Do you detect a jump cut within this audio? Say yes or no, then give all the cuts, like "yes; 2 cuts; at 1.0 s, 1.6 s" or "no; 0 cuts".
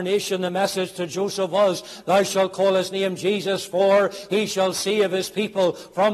no; 0 cuts